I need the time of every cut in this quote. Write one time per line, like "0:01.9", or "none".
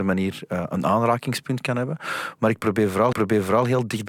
0:03.1